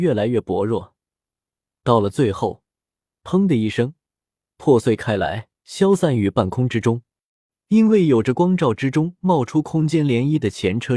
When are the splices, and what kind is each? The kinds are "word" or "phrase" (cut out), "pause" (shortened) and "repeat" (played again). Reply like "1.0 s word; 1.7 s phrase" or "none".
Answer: 5.6 s pause